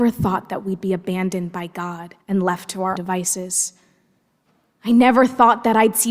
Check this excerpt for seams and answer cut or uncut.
cut